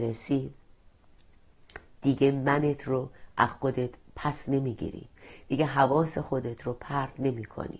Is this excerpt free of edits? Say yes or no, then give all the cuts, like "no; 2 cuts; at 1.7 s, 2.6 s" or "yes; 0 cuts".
yes; 0 cuts